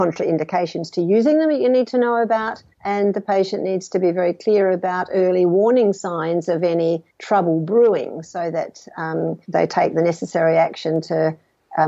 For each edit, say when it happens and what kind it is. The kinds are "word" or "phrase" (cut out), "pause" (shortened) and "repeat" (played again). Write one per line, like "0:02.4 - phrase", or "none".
0:02.7 - pause
0:07.1 - pause
0:09.4 - pause